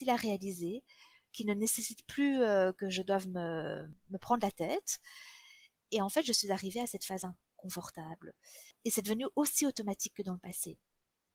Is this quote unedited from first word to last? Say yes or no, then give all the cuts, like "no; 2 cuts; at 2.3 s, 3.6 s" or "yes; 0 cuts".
yes; 0 cuts